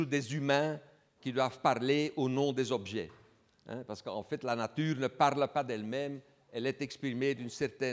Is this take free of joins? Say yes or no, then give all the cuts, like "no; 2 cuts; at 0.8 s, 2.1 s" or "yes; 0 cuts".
yes; 0 cuts